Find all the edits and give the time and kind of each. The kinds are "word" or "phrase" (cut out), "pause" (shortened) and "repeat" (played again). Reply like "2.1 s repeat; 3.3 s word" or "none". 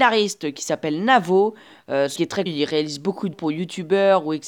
2.2 s word; 2.5 s word; 3.3 s word